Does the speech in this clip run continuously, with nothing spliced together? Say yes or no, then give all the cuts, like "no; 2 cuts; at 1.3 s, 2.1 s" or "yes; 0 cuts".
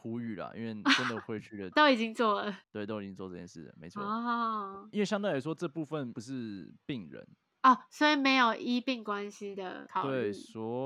yes; 0 cuts